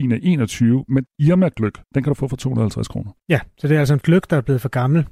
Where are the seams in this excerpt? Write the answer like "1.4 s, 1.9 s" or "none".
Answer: 1.1 s, 1.8 s, 3.2 s, 4.0 s